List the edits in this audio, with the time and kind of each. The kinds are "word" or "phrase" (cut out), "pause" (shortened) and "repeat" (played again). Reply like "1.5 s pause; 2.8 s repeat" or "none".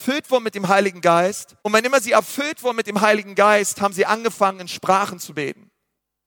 1.6 s pause

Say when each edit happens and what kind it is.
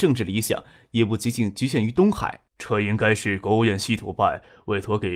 2.5 s pause

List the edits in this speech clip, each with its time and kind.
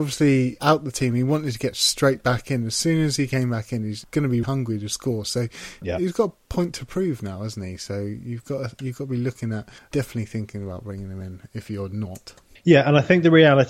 4.4 s word; 9.8 s pause; 12.5 s pause

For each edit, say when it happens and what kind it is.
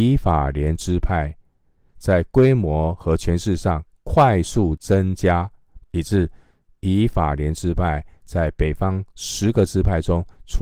5.8 s phrase

